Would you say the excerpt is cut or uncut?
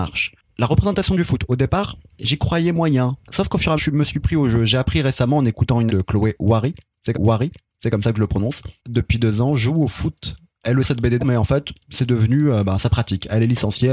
cut